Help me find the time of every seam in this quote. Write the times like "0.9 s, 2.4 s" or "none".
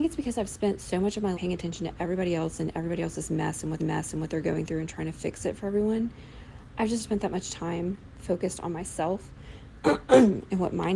1.3 s, 3.8 s, 7.0 s